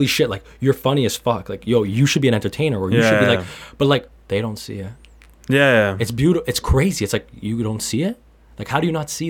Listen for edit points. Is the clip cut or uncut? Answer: uncut